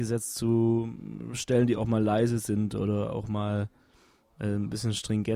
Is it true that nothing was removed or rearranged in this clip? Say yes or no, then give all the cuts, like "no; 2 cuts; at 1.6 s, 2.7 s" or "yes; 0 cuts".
yes; 0 cuts